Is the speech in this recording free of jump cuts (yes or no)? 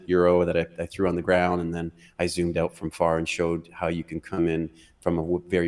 yes